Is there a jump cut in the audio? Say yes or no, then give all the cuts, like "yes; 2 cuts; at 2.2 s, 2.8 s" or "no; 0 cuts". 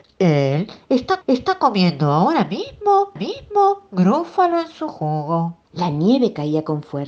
yes; 3 cuts; at 1.2 s, 3.2 s, 5.6 s